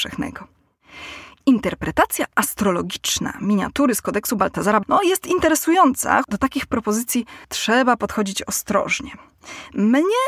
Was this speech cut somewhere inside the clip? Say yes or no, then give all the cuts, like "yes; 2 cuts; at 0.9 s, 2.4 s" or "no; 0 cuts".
yes; 3 cuts; at 4.8 s, 6.2 s, 7.4 s